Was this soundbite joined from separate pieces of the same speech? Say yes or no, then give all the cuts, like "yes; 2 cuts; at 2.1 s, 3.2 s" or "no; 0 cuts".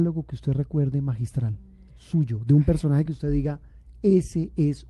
no; 0 cuts